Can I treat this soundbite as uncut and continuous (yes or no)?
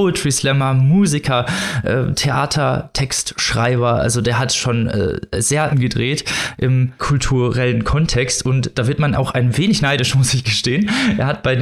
no